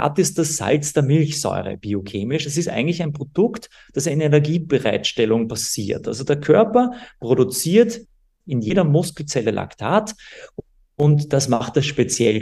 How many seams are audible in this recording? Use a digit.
0